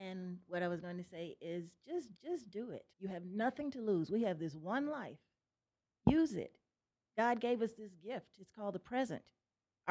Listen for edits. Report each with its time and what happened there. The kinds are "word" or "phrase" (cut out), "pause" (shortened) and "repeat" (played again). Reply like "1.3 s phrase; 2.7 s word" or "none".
2.2 s repeat; 2.9 s pause